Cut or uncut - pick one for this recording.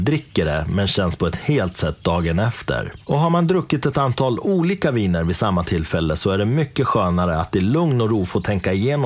cut